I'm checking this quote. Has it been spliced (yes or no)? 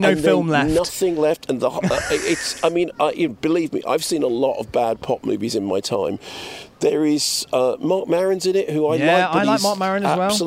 no